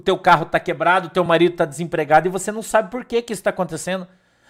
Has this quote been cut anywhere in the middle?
no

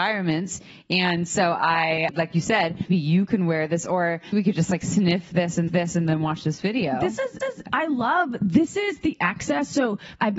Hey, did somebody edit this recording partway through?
yes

